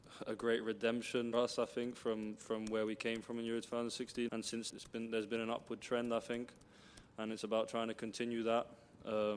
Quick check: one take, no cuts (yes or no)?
no